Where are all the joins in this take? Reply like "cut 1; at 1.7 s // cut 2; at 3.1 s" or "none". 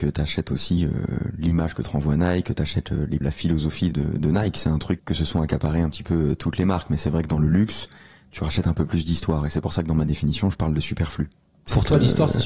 cut 1; at 3.2 s // cut 2; at 3.9 s // cut 3; at 5.0 s